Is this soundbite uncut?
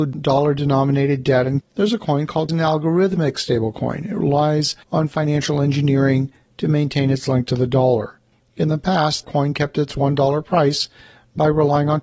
no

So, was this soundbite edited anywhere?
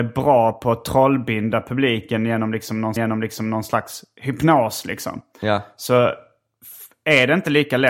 yes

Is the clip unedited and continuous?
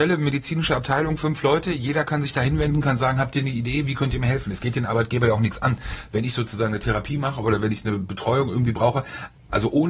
yes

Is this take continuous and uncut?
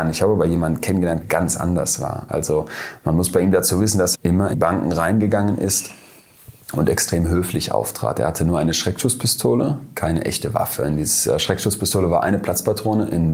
no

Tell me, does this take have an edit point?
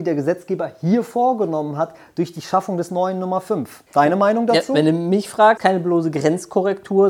yes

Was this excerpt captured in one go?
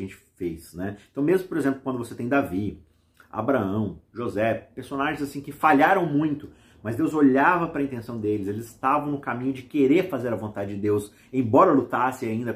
yes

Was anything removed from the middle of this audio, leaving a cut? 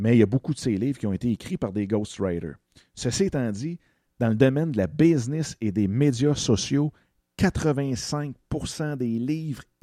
no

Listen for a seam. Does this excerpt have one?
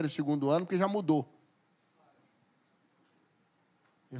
no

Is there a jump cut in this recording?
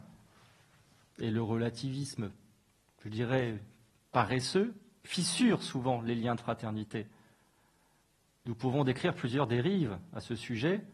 no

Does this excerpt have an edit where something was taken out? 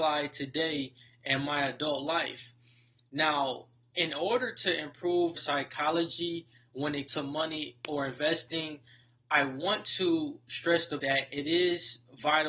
yes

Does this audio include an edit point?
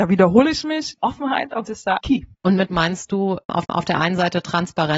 yes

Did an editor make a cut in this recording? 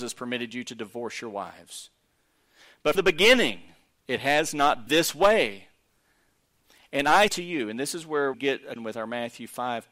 yes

